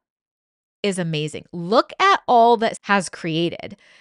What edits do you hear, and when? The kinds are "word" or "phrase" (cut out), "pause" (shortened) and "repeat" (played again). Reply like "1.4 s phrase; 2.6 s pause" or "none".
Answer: 2.8 s phrase

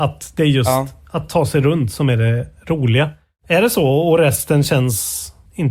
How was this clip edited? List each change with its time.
none

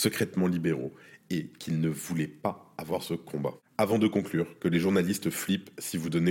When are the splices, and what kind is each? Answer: none

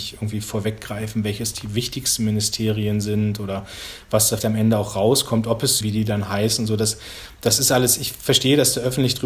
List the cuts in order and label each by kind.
4.4 s word; 5.8 s phrase

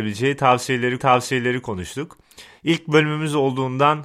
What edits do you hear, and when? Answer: 1.0 s repeat

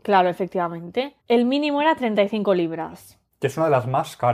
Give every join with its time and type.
1.2 s pause; 3.3 s pause

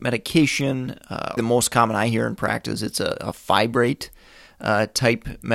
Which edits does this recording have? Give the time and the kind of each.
1.4 s phrase

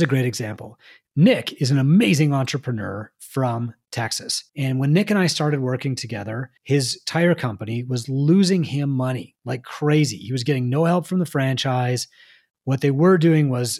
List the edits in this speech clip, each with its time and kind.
4.5 s pause; 6.6 s pause

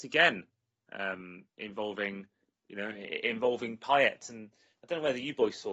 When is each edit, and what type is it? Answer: 1.5 s pause

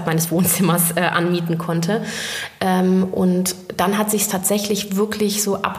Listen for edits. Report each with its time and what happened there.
none

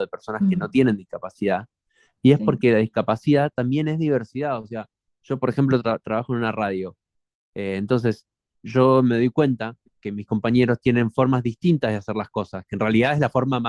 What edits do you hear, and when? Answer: none

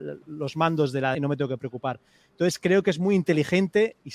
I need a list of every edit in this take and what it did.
1.1 s word

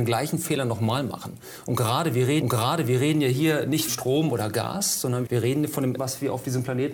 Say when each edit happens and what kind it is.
2.4 s repeat; 3.9 s word; 5.3 s phrase; 6.0 s word

